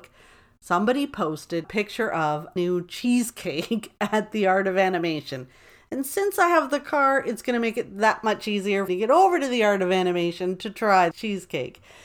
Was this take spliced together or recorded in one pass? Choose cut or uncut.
cut